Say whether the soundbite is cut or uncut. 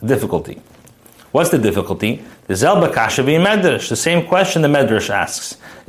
uncut